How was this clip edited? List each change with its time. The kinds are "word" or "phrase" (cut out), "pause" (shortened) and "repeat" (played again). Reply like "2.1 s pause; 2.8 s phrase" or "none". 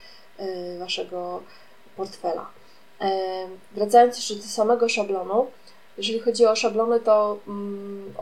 none